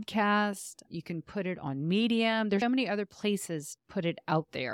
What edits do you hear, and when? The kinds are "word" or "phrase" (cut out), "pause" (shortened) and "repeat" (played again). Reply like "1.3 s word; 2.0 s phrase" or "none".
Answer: 2.6 s word; 3.8 s word

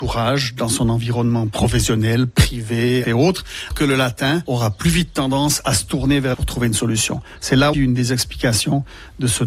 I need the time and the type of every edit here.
3.0 s word; 3.7 s word; 6.3 s word; 7.7 s word

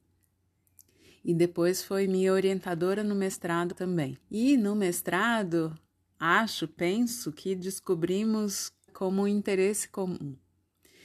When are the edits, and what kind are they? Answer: 3.7 s word; 4.2 s pause; 8.9 s phrase

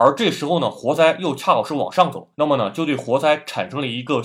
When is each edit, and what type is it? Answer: 2.3 s pause

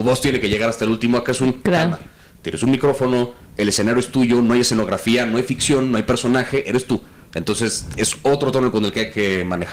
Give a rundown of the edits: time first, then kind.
none

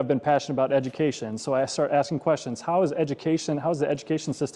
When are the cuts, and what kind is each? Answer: none

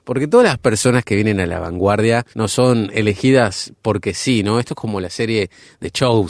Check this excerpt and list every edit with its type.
2.3 s pause

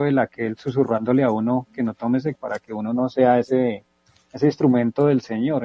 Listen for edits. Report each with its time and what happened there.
2.4 s phrase

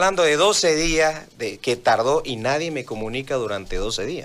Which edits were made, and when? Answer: none

